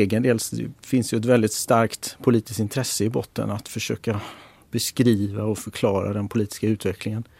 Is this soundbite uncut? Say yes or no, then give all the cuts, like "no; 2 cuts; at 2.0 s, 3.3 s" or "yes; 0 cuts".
yes; 0 cuts